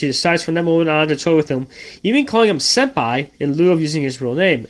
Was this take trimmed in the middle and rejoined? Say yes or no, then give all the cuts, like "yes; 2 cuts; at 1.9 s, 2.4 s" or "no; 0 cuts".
yes; 1 cut; at 3.3 s